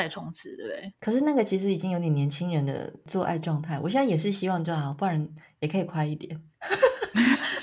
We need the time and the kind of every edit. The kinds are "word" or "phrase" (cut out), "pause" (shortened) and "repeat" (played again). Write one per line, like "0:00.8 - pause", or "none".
0:01.0 - pause